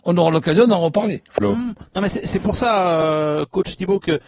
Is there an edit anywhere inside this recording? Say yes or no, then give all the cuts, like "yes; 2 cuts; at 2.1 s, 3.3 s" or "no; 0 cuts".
no; 0 cuts